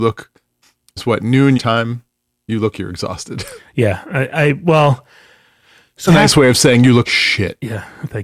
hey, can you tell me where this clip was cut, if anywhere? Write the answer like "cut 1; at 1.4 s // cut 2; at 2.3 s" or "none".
cut 1; at 1.0 s // cut 2; at 1.6 s // cut 3; at 2.7 s // cut 4; at 6.1 s // cut 5; at 7.0 s